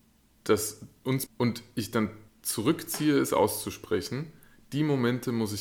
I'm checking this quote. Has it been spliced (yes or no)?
yes